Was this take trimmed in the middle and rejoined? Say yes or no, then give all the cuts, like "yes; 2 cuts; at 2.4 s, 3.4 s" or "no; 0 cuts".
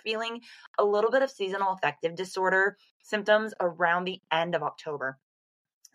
no; 0 cuts